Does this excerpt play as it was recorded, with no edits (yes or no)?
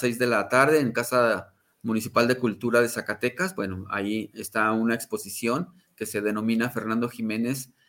yes